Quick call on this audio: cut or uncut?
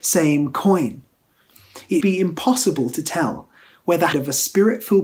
cut